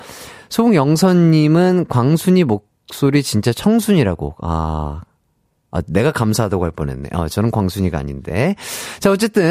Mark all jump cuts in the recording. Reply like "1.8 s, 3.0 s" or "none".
none